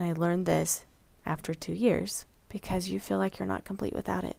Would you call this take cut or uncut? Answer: cut